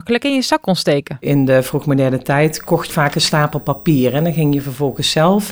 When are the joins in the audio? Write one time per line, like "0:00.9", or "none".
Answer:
0:02.9